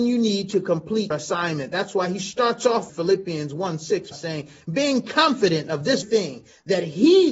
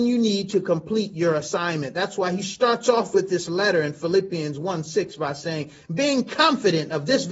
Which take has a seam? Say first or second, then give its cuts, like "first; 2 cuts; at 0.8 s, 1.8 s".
first; 4 cuts; at 1.1 s, 2.9 s, 4.1 s, 6.0 s